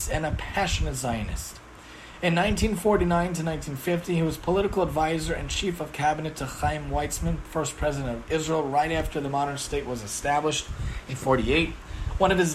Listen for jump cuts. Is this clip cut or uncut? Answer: uncut